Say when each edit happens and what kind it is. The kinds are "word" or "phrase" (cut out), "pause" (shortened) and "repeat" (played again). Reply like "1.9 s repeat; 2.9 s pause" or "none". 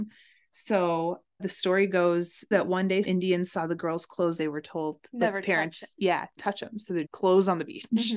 1.4 s word; 2.5 s word; 3.0 s word; 4.4 s phrase; 6.4 s word; 7.0 s word